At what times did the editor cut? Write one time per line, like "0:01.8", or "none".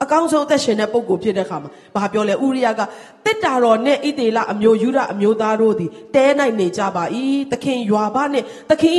none